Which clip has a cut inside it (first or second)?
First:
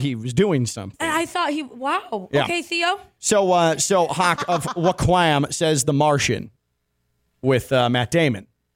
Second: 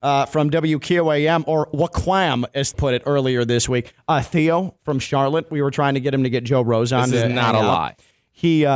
second